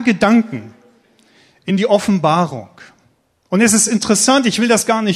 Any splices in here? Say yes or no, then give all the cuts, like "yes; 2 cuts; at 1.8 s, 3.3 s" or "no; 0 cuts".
no; 0 cuts